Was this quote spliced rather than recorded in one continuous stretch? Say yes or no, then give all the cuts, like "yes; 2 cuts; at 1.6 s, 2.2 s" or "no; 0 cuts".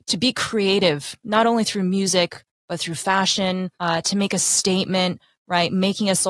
yes; 1 cut; at 3.7 s